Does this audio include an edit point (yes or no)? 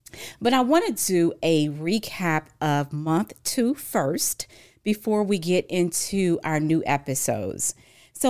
no